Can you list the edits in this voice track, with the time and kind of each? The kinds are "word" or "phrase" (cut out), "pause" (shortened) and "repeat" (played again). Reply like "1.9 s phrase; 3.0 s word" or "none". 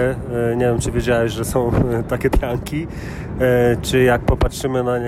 2.3 s word